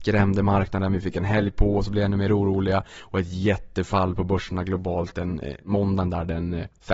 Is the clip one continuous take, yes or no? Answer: yes